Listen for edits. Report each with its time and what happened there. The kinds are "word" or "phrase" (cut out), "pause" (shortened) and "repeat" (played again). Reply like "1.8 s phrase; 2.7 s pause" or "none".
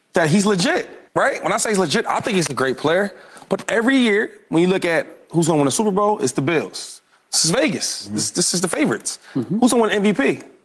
1.1 s pause